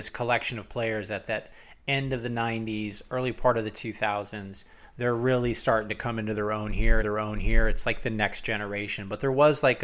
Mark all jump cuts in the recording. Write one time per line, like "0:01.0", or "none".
0:07.0